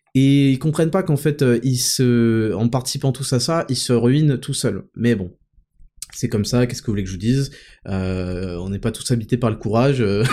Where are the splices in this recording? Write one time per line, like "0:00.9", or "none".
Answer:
none